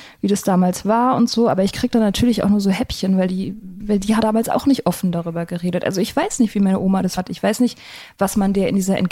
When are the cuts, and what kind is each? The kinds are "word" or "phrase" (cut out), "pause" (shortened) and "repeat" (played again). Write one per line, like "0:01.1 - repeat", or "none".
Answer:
0:03.8 - word
0:04.2 - word
0:07.2 - word